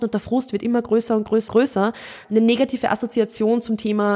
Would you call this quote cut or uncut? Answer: cut